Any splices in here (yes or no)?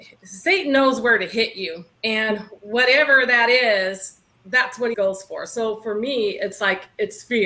yes